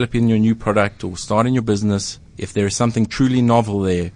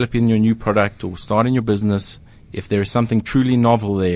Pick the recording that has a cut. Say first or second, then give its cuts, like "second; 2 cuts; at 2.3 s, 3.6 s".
first; 1 cut; at 2.3 s